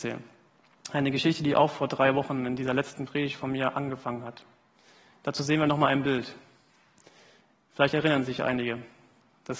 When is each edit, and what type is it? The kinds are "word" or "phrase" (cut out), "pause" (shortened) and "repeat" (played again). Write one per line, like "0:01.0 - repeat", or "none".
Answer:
none